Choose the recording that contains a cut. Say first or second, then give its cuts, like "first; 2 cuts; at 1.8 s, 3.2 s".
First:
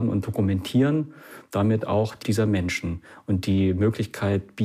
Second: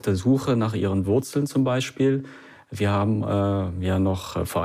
first; 1 cut; at 2.2 s